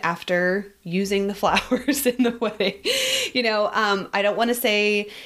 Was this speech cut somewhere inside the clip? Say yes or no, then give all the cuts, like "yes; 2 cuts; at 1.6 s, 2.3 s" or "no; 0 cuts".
no; 0 cuts